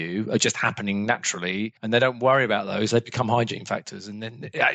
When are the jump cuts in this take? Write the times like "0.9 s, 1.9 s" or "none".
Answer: 1.8 s